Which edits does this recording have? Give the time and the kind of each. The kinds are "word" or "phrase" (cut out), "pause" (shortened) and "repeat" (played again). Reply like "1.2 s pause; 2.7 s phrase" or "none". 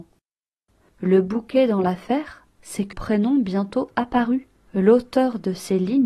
2.9 s word